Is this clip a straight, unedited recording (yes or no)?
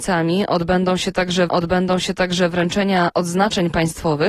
no